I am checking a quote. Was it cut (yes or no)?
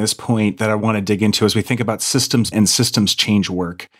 yes